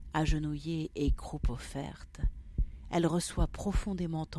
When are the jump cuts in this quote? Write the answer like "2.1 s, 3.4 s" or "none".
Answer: none

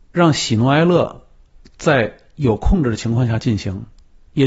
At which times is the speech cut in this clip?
none

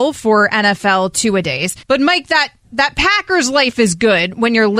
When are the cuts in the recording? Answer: 1.8 s, 2.6 s

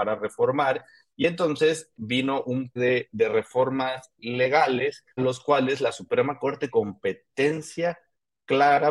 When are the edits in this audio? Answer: 1.9 s, 2.8 s, 3.1 s, 5.2 s, 6.7 s

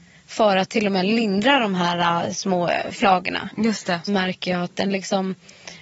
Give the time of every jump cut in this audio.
4.1 s

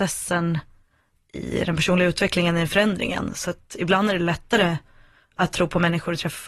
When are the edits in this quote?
none

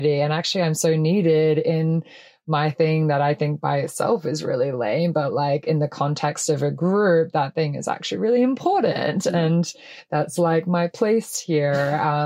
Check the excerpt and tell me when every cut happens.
none

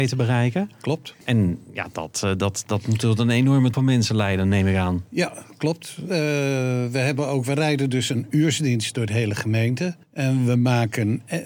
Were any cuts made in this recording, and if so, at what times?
1.2 s, 3.7 s, 10.0 s

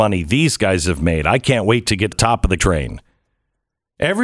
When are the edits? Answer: 2.1 s, 2.6 s

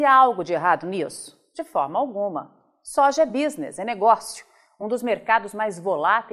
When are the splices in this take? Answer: none

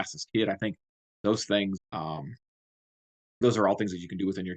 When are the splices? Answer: 1.8 s, 3.4 s

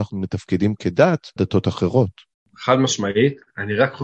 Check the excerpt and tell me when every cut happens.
1.4 s, 2.3 s

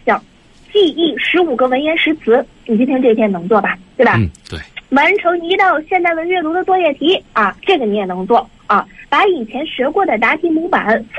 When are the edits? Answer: 7.6 s

